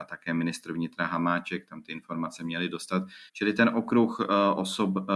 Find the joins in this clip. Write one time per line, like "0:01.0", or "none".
0:03.3